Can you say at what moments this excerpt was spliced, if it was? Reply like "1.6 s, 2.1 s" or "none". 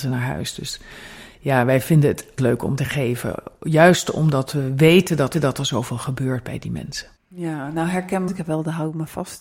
2.4 s, 2.8 s, 5.3 s, 7.2 s, 8.3 s